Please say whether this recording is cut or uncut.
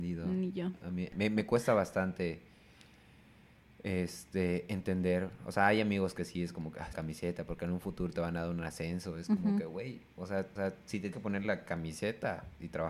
cut